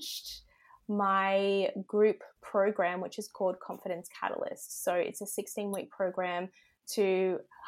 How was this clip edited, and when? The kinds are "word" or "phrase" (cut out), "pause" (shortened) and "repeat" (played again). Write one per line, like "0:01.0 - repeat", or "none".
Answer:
none

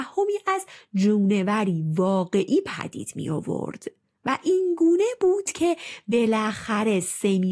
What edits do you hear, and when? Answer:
none

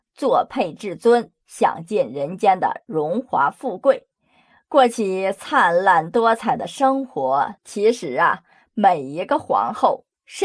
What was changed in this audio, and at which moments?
0:07.6 - pause

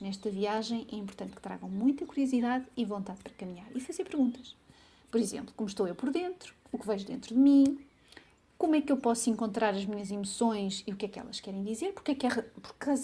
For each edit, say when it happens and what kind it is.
none

